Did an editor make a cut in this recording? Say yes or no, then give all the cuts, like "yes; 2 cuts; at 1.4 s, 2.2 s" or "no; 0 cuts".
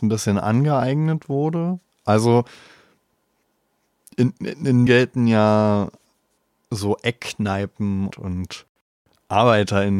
yes; 2 cuts; at 4.9 s, 8.1 s